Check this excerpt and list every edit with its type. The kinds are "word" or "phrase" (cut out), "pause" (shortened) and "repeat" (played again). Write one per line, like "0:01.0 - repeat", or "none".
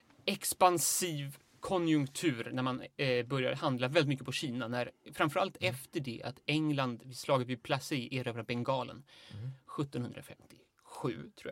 none